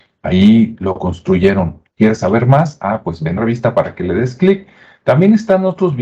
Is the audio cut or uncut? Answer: cut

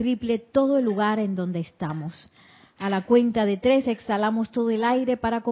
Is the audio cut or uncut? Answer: uncut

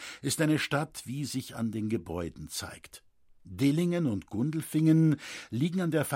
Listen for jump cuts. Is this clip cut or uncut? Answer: uncut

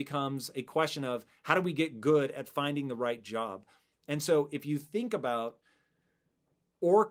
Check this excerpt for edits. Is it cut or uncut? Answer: uncut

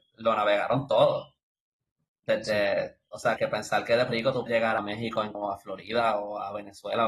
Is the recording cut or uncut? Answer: cut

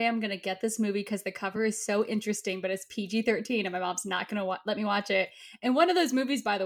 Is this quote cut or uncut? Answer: uncut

